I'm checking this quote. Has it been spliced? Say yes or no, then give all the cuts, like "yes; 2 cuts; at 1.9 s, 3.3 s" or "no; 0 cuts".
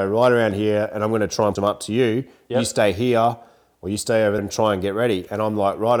yes; 2 cuts; at 1.6 s, 4.4 s